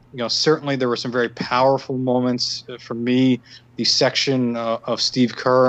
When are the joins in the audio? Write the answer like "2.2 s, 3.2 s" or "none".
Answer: 3.7 s

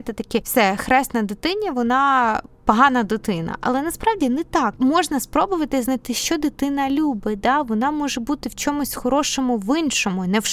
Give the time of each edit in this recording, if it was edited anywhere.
none

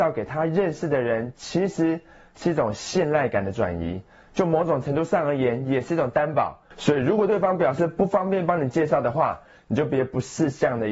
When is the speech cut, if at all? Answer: none

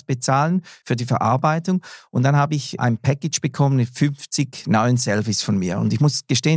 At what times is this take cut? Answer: 2.8 s

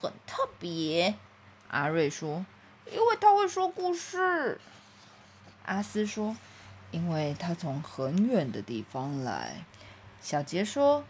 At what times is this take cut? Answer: 1.3 s, 9.7 s

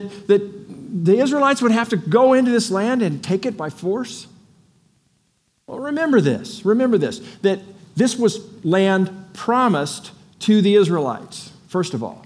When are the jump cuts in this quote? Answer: none

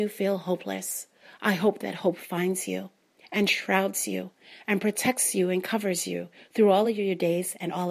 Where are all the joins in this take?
none

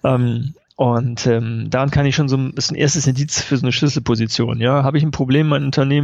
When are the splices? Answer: none

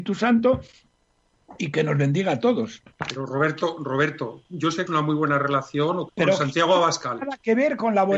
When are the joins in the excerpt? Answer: 2.9 s, 4.9 s, 6.1 s

